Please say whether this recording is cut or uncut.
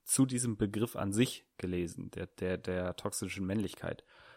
uncut